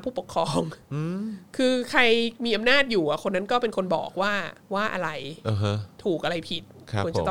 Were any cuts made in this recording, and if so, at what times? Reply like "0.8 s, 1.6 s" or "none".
4.6 s